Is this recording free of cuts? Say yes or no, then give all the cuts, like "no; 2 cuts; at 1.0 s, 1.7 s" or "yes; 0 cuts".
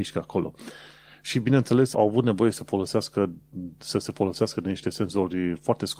no; 1 cut; at 1.9 s